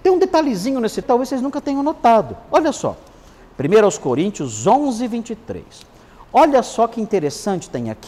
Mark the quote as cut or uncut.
cut